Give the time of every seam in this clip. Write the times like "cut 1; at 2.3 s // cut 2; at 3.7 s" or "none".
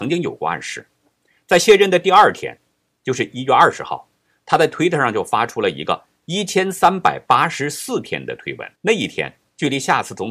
cut 1; at 8.8 s